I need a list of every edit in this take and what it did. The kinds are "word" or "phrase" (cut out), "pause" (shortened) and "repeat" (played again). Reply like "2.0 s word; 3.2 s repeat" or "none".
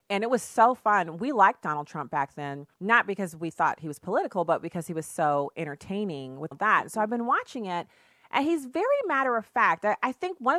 2.7 s pause; 6.5 s phrase